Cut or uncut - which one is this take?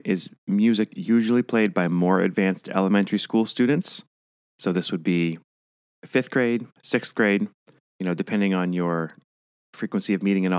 uncut